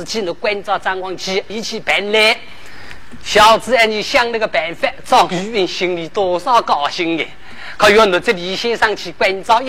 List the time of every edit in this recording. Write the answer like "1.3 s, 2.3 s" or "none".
1.5 s